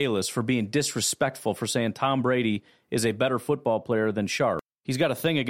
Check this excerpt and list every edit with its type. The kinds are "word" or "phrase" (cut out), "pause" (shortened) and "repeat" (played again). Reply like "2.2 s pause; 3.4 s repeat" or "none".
none

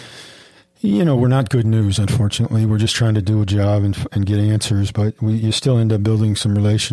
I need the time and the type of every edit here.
4.9 s word

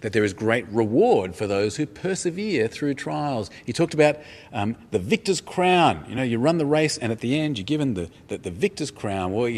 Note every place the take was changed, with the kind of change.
none

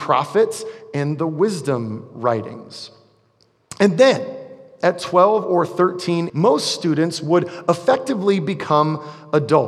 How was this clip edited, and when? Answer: 6.3 s phrase

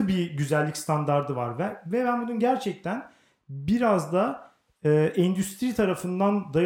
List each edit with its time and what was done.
none

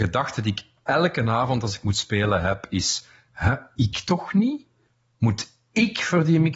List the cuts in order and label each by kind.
4.9 s pause

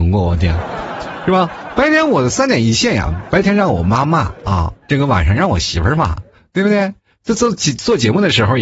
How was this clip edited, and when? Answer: 4.8 s pause

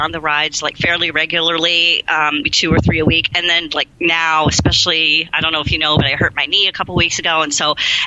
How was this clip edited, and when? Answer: 2.4 s word

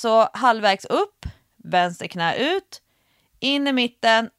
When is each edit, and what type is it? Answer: none

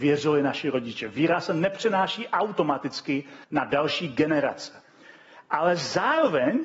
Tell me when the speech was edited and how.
3.4 s pause

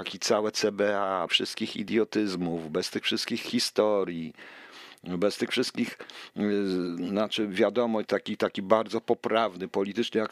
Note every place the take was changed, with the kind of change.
1.3 s phrase; 8.0 s word

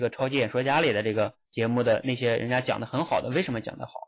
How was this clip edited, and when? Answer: 1.5 s pause

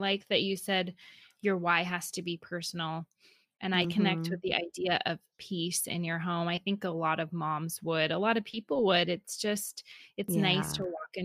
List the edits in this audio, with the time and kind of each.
none

